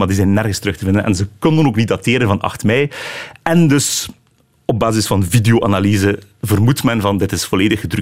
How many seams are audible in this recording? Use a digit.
0